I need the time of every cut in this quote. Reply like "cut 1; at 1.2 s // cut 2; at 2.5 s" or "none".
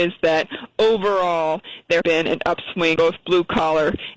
cut 1; at 2.0 s // cut 2; at 3.0 s